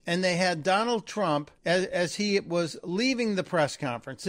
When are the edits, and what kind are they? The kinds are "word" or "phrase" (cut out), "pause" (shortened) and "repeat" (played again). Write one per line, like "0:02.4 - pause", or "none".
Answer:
0:01.6 - pause